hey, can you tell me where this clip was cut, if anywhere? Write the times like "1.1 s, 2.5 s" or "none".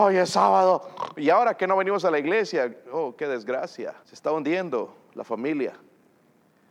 4.0 s